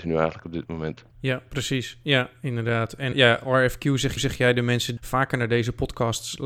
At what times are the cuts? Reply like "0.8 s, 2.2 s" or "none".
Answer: 1.1 s, 3.1 s, 4.2 s, 5.0 s